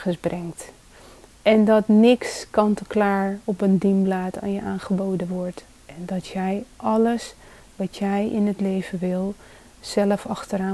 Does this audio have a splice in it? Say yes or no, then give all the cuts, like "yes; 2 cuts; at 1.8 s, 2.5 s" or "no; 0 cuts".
no; 0 cuts